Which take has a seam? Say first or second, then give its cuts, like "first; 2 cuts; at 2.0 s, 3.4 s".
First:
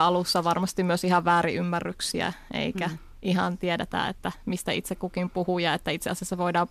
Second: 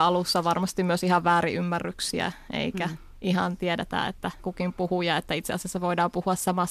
second; 1 cut; at 4.4 s